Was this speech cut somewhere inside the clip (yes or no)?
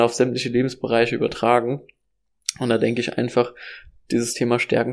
no